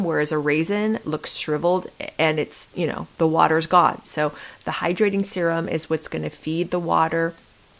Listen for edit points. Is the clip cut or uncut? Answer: uncut